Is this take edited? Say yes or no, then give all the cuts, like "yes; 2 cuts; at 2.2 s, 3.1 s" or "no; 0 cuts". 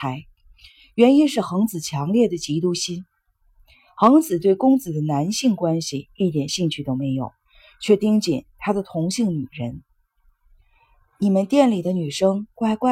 no; 0 cuts